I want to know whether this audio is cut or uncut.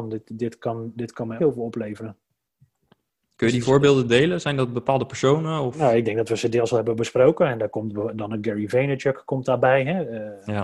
cut